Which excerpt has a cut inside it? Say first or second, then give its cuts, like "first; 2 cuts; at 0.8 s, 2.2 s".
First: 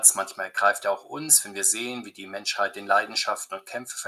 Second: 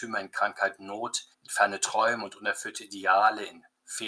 second; 1 cut; at 1.3 s